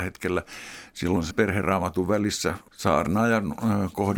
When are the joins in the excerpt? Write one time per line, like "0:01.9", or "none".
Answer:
0:01.3
0:02.7